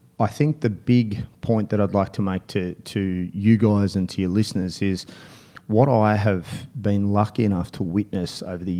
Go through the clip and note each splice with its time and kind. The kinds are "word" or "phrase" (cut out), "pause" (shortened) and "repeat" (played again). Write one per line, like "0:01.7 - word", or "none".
none